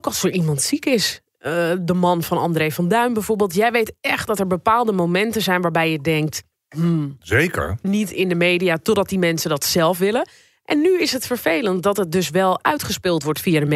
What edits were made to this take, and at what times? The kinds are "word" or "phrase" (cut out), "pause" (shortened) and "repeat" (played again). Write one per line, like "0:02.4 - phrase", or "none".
0:07.8 - word